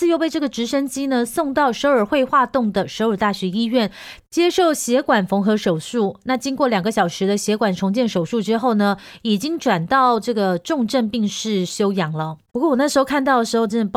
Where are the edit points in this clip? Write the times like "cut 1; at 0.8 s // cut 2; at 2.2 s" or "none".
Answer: cut 1; at 12.5 s